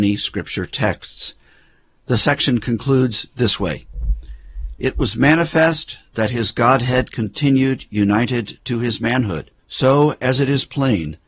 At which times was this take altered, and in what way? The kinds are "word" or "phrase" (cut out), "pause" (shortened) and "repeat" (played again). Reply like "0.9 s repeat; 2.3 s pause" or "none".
9.6 s pause